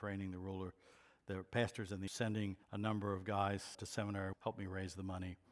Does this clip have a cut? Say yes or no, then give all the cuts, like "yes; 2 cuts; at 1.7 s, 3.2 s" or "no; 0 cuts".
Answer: yes; 4 cuts; at 2.1 s, 2.6 s, 3.7 s, 4.3 s